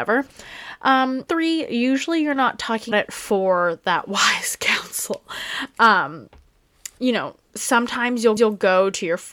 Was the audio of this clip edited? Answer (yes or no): yes